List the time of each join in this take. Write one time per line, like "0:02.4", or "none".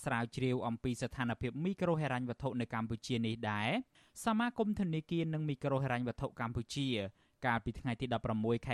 none

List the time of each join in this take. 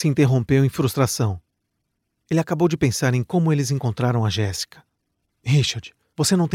none

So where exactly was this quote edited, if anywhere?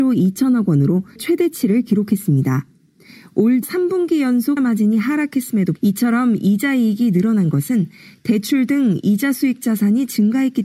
0:01.2
0:03.6
0:04.6
0:05.8

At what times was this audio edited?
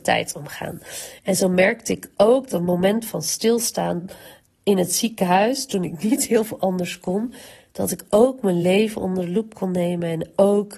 none

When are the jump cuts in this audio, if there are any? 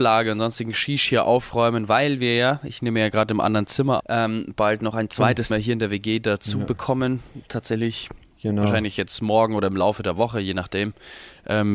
0:04.0
0:05.5

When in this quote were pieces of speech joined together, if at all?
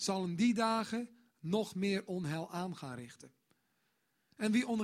none

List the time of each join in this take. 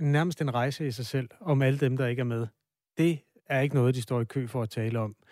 none

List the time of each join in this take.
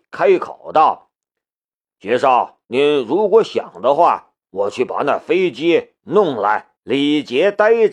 0:01.2
0:02.6
0:04.4
0:06.8

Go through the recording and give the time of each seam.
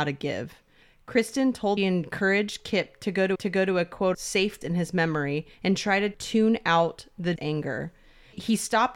0:01.8
0:03.3
0:04.1
0:04.6
0:05.5
0:07.4

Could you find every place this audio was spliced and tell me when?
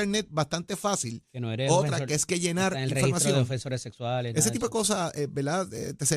0:01.3

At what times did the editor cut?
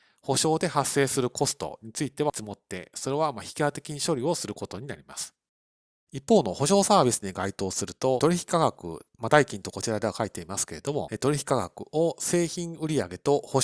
none

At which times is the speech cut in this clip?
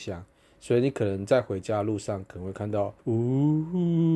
0:03.0

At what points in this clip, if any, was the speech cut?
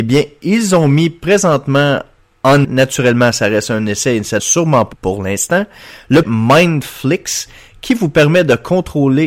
0:02.6
0:04.4
0:04.9
0:06.2

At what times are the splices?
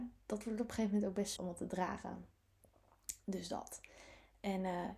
0:01.4

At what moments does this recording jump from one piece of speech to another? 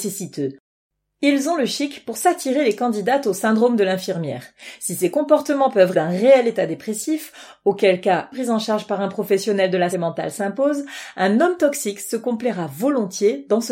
0:05.9
0:08.3
0:09.9

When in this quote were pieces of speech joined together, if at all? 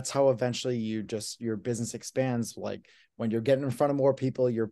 none

